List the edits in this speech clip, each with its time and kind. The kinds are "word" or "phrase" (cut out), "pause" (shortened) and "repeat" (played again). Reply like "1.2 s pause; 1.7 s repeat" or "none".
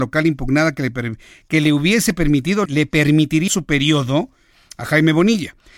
2.7 s word; 3.5 s word